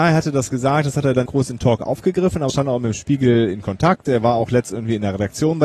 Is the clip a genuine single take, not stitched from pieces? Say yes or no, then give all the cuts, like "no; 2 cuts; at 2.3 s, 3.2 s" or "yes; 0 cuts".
no; 2 cuts; at 1.3 s, 2.5 s